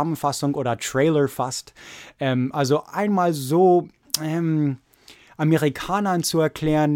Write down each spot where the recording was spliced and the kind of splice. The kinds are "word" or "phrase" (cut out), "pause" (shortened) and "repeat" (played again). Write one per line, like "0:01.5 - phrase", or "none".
none